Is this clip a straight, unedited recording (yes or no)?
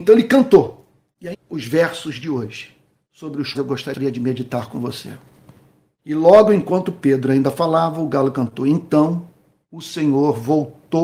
no